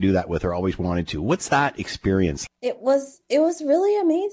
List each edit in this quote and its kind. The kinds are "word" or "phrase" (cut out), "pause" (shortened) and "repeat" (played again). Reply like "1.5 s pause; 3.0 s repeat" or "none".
2.5 s word